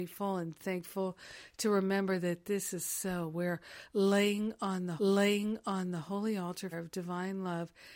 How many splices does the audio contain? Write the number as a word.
two